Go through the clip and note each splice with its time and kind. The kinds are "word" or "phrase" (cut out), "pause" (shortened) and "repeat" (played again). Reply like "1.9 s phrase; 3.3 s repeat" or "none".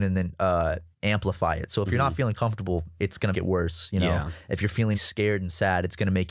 0.9 s pause; 3.3 s word; 4.9 s word